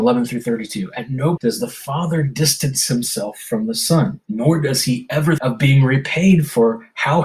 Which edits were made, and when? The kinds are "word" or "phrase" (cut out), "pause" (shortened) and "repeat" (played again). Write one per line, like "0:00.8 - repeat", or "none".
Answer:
0:01.4 - word
0:04.2 - pause
0:05.4 - word